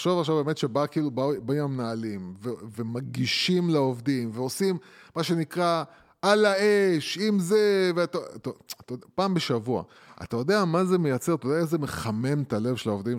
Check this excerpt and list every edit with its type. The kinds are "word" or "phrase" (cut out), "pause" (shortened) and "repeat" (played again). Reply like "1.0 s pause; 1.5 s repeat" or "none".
none